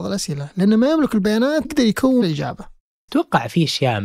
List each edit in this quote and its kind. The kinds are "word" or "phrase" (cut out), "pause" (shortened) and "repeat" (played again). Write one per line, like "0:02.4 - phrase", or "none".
0:01.6 - word
0:02.2 - word
0:03.1 - word